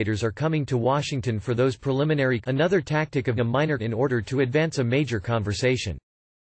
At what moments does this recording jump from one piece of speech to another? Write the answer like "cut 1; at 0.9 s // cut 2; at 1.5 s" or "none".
cut 1; at 2.4 s // cut 2; at 3.4 s // cut 3; at 3.8 s